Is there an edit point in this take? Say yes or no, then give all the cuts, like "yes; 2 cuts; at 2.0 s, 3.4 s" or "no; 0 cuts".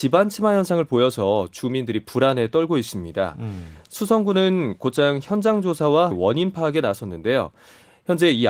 yes; 1 cut; at 6.1 s